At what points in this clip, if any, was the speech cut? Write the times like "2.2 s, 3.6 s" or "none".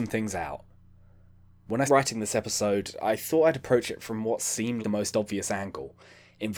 1.9 s, 4.8 s